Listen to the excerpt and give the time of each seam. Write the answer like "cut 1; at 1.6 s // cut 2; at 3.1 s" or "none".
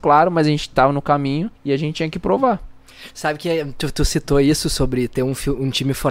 cut 1; at 1.6 s